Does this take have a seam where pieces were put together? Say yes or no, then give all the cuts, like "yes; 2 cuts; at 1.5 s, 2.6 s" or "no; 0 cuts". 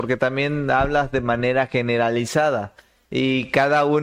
no; 0 cuts